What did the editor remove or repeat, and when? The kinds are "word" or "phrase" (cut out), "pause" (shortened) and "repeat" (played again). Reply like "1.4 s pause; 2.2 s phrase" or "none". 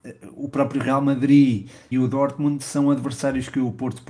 1.9 s phrase